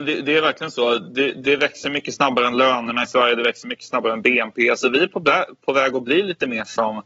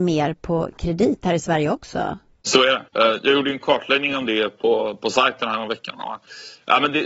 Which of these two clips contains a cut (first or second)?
second